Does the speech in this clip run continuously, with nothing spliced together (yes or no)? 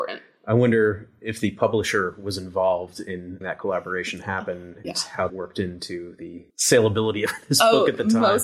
no